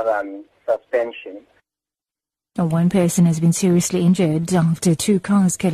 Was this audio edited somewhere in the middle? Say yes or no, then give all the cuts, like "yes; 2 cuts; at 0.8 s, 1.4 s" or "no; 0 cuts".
no; 0 cuts